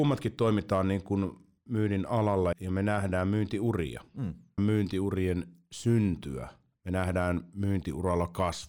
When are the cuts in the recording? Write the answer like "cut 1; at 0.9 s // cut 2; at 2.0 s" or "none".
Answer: cut 1; at 1.7 s // cut 2; at 2.5 s // cut 3; at 4.6 s